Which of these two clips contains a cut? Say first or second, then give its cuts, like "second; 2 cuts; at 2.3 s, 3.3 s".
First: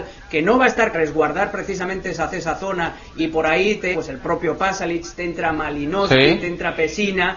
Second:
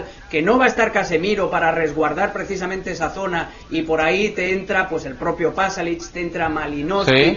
first; 3 cuts; at 0.9 s, 2.3 s, 3.9 s